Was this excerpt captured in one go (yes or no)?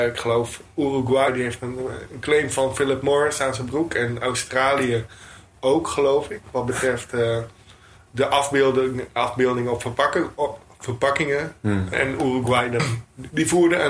yes